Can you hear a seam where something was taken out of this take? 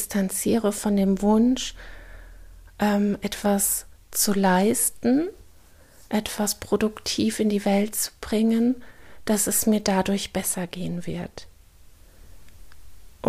no; 0 cuts

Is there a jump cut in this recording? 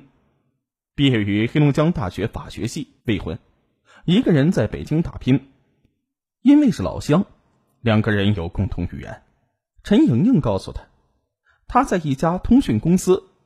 yes; 1 cut; at 3.0 s

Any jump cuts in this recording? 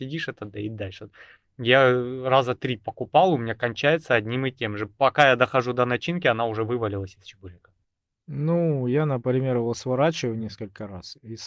no; 0 cuts

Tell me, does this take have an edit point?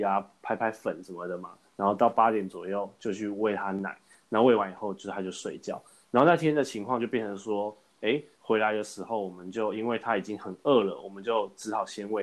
no; 0 cuts

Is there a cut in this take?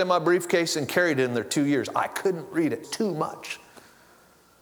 yes; 1 cut; at 2.8 s

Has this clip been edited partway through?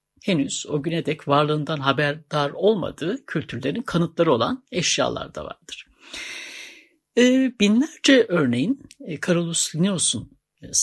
no; 0 cuts

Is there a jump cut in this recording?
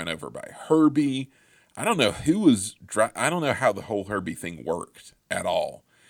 no; 0 cuts

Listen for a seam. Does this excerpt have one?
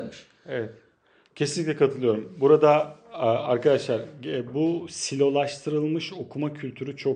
no; 0 cuts

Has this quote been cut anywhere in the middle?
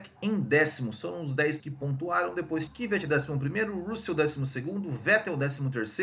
yes; 2 cuts; at 1.6 s, 2.7 s

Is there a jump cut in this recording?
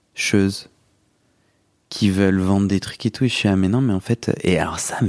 no; 0 cuts

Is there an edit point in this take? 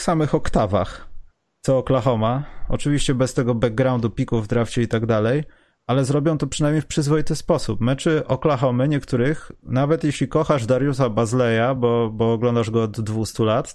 no; 0 cuts

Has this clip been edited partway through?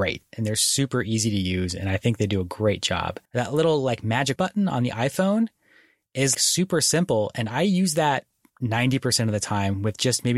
yes; 3 cuts; at 3.3 s, 4.4 s, 6.3 s

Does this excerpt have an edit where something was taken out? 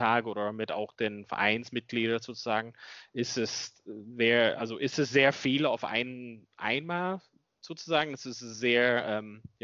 no; 0 cuts

